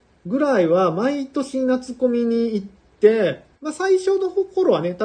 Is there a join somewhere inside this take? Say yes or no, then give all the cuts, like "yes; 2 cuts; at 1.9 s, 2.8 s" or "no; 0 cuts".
yes; 1 cut; at 3.5 s